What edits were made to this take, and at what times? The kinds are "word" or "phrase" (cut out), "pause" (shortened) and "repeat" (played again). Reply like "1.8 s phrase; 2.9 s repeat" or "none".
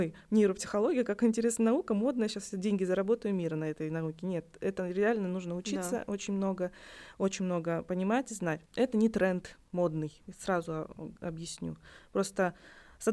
8.6 s pause; 10.2 s pause